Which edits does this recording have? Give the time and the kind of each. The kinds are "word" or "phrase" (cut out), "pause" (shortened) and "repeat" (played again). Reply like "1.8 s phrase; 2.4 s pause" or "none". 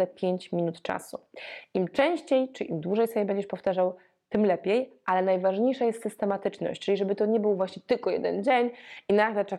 none